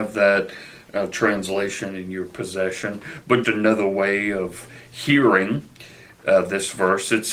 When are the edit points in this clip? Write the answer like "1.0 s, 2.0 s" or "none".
3.4 s